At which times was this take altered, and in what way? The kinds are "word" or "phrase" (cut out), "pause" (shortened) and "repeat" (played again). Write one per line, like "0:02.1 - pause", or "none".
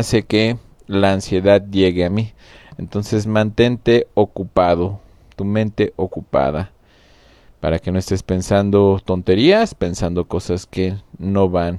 none